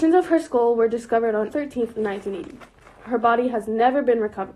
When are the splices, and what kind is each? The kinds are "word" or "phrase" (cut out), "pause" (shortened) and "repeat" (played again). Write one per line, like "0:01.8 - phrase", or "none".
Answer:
0:01.5 - word